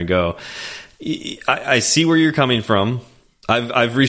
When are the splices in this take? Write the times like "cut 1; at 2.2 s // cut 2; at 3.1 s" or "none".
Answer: none

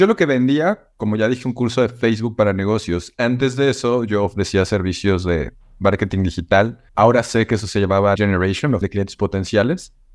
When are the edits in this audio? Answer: cut 1; at 1.4 s // cut 2; at 6.9 s // cut 3; at 8.2 s // cut 4; at 8.8 s

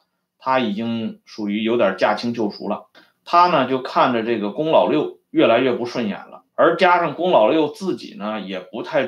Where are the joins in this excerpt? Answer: cut 1; at 2.9 s // cut 2; at 6.5 s

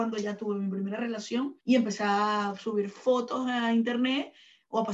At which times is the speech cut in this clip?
cut 1; at 1.6 s

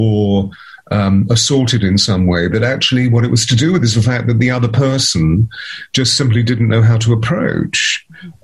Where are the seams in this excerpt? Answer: none

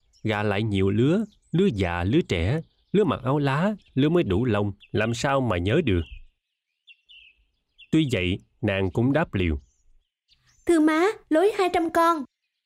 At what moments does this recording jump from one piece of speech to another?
none

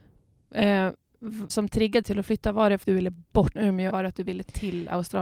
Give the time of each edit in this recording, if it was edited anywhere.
cut 1; at 1.5 s // cut 2; at 2.0 s // cut 3; at 2.8 s // cut 4; at 3.6 s // cut 5; at 3.9 s

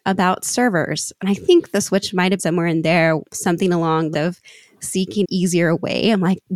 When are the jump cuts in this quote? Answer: cut 1; at 2.4 s // cut 2; at 3.3 s // cut 3; at 4.1 s // cut 4; at 5.2 s

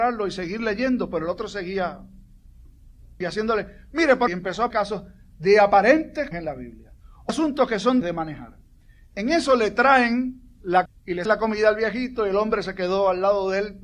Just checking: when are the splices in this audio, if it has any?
cut 1; at 3.2 s // cut 2; at 4.3 s // cut 3; at 4.7 s // cut 4; at 6.3 s // cut 5; at 7.3 s // cut 6; at 8.0 s // cut 7; at 10.9 s // cut 8; at 11.3 s

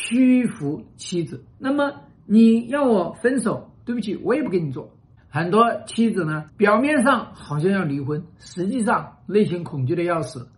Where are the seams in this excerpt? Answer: cut 1; at 1.5 s // cut 2; at 6.5 s

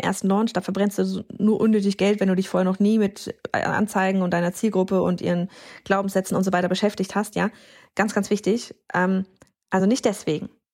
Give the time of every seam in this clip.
none

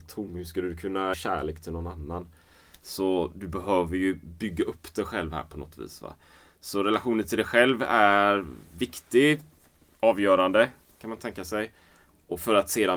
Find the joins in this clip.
cut 1; at 1.1 s

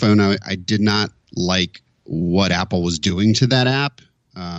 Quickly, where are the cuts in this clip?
cut 1; at 1.9 s

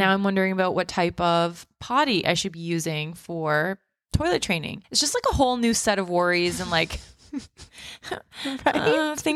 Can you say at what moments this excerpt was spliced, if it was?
cut 1; at 4.8 s

